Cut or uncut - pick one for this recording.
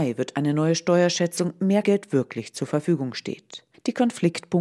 cut